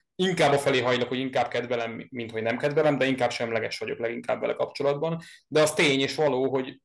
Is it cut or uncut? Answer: uncut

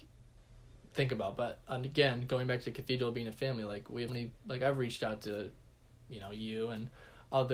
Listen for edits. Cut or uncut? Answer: cut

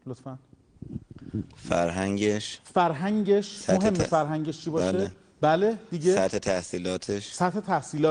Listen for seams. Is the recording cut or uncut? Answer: uncut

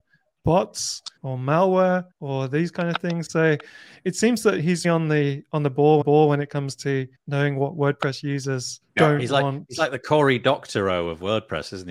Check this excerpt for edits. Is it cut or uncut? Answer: cut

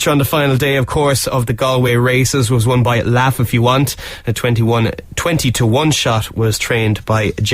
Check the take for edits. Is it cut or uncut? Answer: uncut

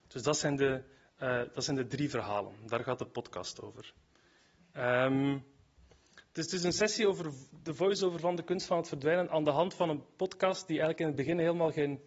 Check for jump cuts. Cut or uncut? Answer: uncut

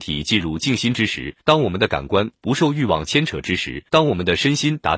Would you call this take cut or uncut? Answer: cut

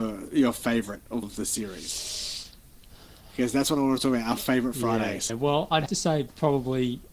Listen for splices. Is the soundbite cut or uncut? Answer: cut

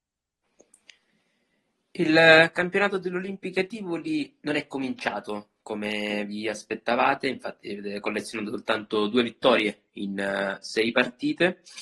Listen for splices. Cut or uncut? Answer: uncut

